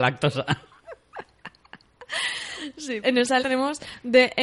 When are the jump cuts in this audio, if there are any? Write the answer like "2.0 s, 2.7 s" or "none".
3.0 s, 3.4 s